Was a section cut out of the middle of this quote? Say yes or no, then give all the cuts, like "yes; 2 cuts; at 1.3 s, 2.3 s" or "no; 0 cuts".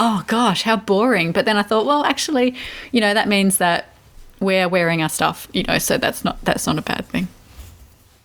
no; 0 cuts